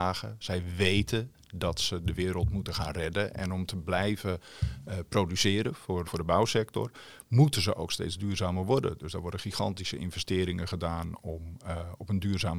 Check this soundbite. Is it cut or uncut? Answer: cut